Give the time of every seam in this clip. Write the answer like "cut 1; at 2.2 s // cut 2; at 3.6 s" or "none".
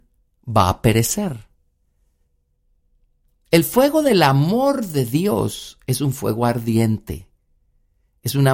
none